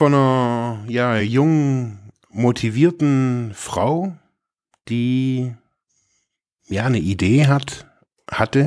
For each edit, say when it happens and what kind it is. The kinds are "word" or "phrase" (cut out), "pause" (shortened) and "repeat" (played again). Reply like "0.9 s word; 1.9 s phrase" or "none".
none